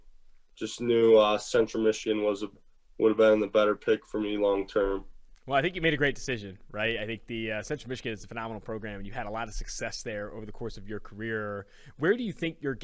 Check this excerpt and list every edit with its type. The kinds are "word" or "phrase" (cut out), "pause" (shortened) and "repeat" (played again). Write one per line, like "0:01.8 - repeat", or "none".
none